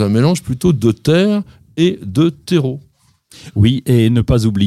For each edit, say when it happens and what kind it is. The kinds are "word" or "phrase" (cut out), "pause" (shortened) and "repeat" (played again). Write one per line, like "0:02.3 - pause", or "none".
none